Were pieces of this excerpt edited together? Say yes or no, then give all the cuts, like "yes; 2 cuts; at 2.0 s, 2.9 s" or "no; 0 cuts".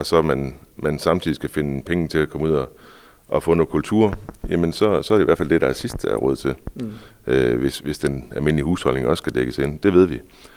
no; 0 cuts